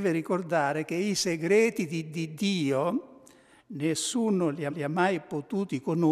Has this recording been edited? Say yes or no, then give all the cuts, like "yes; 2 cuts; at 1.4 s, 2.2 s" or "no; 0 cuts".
yes; 2 cuts; at 2.1 s, 4.7 s